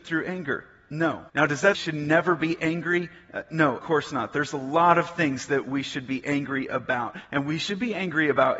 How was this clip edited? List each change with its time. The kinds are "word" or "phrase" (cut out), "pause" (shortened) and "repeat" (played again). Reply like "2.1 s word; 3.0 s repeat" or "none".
1.3 s pause; 1.7 s phrase; 3.8 s word